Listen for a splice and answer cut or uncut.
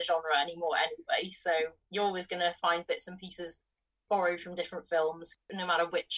uncut